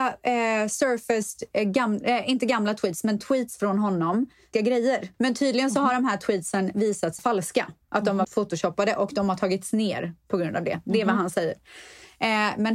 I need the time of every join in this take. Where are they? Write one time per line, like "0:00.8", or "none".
0:04.5
0:05.1
0:07.2
0:07.8
0:08.2